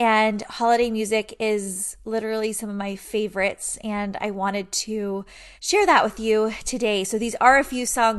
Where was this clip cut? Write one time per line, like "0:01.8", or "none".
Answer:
0:05.6